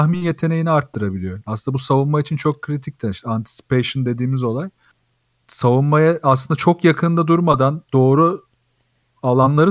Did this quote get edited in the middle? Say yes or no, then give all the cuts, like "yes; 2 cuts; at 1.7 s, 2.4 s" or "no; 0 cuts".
no; 0 cuts